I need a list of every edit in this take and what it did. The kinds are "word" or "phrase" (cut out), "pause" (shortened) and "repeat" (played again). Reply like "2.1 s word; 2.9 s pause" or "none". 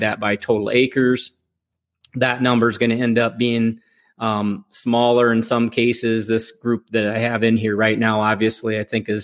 none